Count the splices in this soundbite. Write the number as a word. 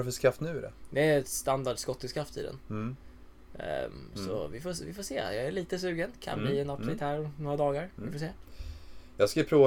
zero